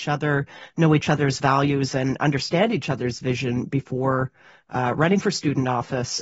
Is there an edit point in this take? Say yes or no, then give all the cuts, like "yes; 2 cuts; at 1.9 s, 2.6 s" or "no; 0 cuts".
no; 0 cuts